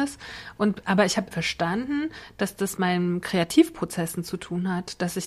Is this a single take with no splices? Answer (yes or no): no